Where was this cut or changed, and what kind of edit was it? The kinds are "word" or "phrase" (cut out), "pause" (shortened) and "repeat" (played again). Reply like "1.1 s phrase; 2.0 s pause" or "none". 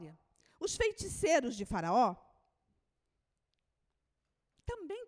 none